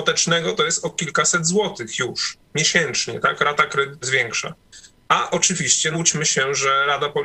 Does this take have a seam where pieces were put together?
yes; 2 cuts; at 4.0 s, 5.9 s

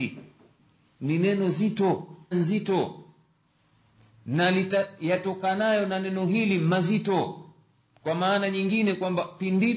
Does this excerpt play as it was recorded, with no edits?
no; 1 cut; at 2.3 s

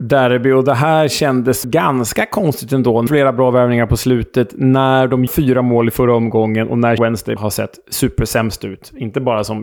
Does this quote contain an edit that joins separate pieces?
yes; 5 cuts; at 1.6 s, 3.1 s, 5.3 s, 7.0 s, 7.4 s

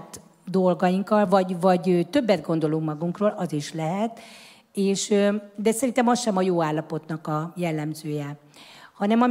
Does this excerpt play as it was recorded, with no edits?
yes; 0 cuts

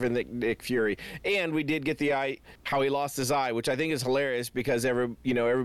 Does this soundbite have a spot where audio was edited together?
yes; 1 cut; at 2.4 s

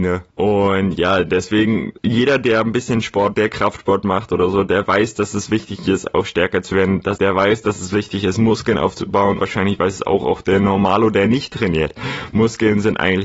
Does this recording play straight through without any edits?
no; 4 cuts; at 2.0 s, 3.3 s, 7.2 s, 9.4 s

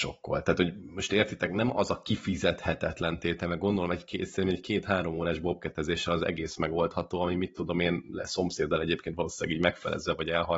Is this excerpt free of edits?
yes; 0 cuts

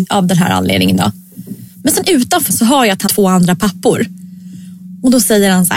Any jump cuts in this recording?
yes; 2 cuts; at 2.5 s, 3.1 s

